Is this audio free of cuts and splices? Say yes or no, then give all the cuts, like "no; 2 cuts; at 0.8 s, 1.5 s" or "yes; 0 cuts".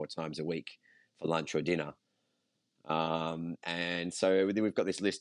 yes; 0 cuts